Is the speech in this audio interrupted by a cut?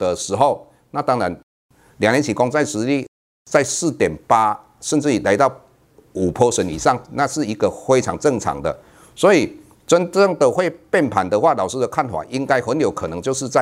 no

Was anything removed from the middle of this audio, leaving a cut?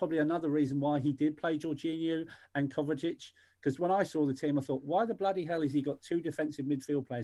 no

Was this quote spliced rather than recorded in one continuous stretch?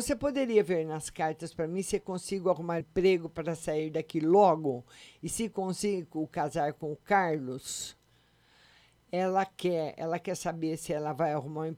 yes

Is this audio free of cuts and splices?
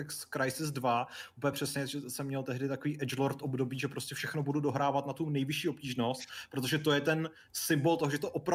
yes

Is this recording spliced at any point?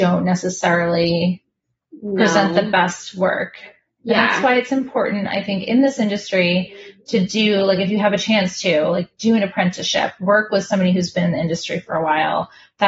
no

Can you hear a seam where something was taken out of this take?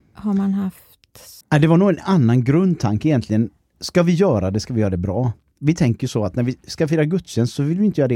yes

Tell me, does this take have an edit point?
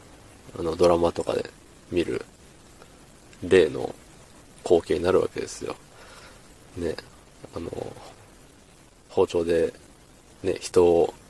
no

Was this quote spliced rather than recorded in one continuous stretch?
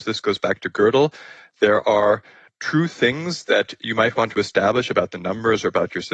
no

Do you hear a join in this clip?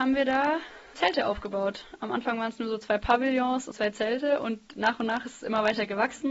yes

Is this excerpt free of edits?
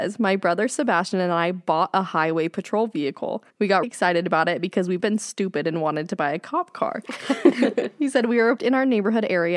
no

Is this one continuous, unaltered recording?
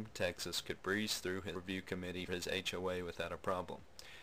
no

